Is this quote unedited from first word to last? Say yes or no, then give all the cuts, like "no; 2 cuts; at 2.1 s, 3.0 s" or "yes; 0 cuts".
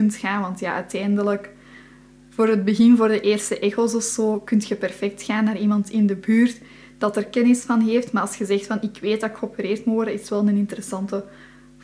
yes; 0 cuts